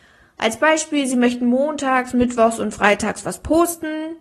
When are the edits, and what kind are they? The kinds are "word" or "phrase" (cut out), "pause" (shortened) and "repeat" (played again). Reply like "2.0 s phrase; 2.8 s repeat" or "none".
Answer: none